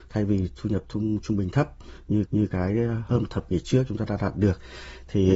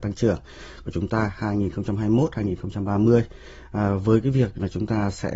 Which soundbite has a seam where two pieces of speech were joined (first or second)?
first